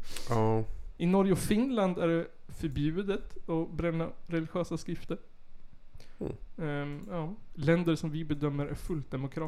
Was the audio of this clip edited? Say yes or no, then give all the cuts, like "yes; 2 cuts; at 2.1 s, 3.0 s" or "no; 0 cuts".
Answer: no; 0 cuts